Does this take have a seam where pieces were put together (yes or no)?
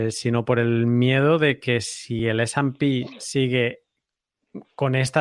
no